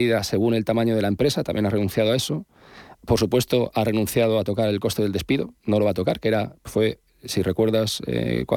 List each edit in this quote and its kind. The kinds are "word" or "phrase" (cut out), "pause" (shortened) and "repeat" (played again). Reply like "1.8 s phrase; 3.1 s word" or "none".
3.0 s pause; 5.6 s pause